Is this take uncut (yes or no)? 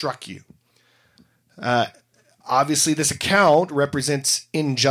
yes